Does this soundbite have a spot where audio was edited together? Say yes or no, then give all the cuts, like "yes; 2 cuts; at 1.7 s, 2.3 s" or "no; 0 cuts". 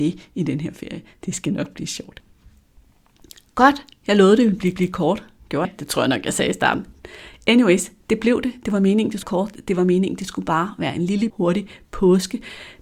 yes; 4 cuts; at 4.8 s, 5.6 s, 9.2 s, 11.3 s